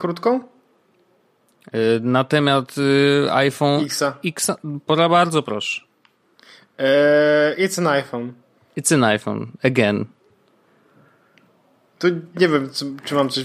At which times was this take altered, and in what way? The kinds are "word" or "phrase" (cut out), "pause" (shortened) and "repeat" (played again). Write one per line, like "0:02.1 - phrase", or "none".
none